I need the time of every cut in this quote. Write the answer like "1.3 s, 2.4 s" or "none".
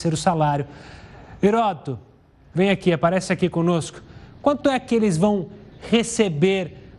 none